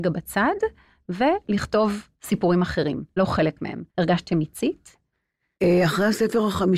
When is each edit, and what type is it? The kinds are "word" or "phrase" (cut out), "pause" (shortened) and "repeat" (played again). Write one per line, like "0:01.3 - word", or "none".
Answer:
0:02.1 - pause
0:03.2 - word
0:03.9 - pause

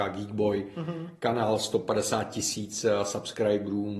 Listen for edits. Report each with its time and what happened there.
none

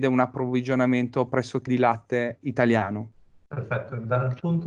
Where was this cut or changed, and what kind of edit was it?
0:01.7 - word
0:02.4 - word

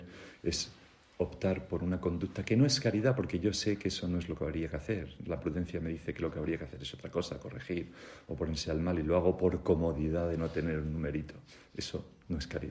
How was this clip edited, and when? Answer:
none

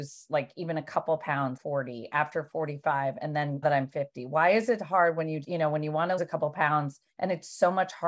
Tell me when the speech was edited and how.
0:01.6 - word
0:03.6 - word
0:05.4 - word
0:06.2 - word
0:07.1 - pause

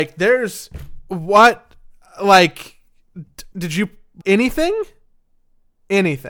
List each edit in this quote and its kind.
0:03.5 - word
0:04.2 - word

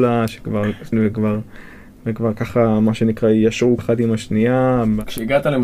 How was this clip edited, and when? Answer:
0:00.9 - word
0:03.8 - word

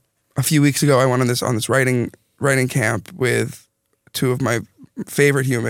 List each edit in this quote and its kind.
none

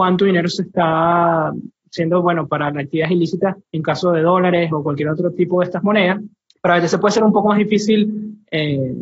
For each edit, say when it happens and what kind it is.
0:03.6 - pause
0:06.5 - pause

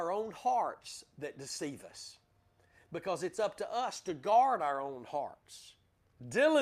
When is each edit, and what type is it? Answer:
none

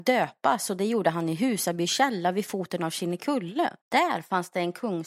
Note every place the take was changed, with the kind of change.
0:03.8 - pause

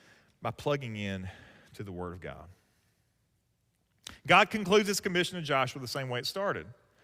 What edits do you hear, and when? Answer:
none

